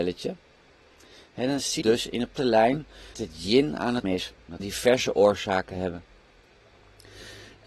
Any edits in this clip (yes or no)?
yes